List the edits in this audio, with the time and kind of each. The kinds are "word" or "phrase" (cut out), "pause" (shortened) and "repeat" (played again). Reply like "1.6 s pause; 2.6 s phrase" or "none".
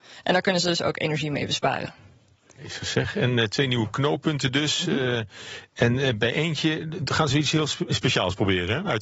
none